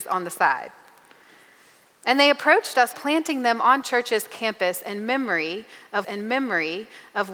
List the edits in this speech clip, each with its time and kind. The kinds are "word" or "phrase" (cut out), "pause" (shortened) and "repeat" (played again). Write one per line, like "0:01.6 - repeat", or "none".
0:02.9 - phrase
0:03.8 - word
0:06.0 - repeat